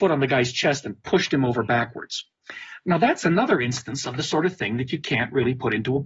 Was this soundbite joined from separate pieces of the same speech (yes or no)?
no